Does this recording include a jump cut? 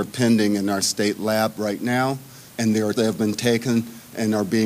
yes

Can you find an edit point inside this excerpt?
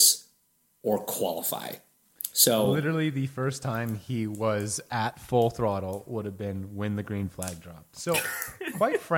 no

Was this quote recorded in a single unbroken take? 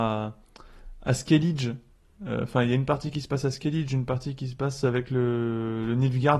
yes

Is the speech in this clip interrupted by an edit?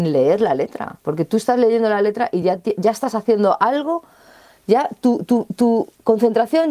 no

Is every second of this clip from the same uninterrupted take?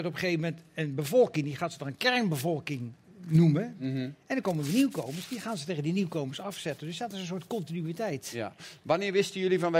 yes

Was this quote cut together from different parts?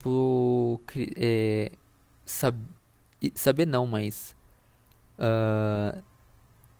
no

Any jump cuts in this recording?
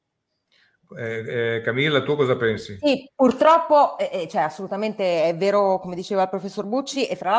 no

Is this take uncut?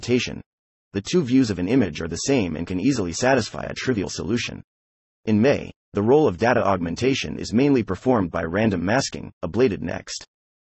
yes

